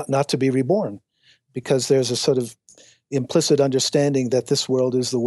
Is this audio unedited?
yes; 0 cuts

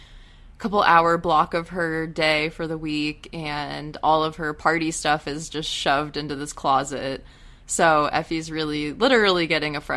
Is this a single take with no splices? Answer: yes; 0 cuts

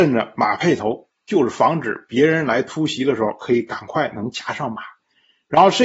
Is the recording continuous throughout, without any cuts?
yes; 0 cuts

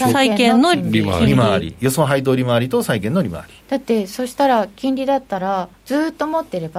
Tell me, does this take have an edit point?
yes; 2 cuts; at 3.6 s, 5.8 s

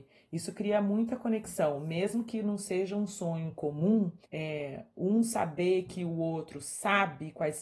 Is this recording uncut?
no; 1 cut; at 4.2 s

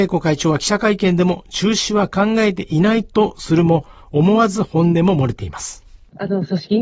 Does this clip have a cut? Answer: no; 0 cuts

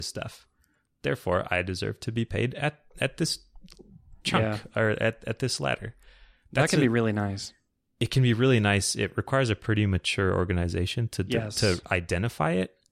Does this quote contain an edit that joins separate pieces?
no; 0 cuts

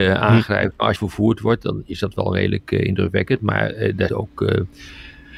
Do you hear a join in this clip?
yes; 2 cuts; at 1.0 s, 4.1 s

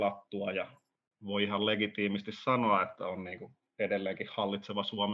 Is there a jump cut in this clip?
no; 0 cuts

